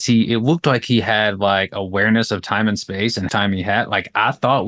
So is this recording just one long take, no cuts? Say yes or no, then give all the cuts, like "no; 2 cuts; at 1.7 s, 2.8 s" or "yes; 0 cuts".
no; 1 cut; at 3.3 s